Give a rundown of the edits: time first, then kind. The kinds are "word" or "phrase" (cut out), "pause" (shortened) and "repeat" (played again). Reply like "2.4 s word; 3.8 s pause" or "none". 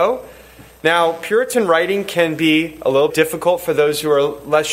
3.1 s word